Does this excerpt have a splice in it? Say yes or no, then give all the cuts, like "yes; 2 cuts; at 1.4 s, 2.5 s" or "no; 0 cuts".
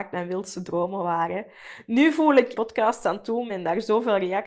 yes; 2 cuts; at 2.5 s, 3.5 s